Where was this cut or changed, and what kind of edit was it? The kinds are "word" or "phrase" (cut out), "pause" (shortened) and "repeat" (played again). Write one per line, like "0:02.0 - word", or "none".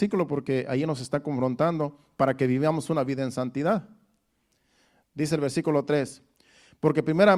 none